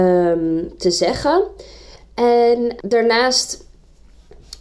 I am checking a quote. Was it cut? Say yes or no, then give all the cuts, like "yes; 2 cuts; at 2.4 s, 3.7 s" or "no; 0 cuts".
yes; 1 cut; at 2.8 s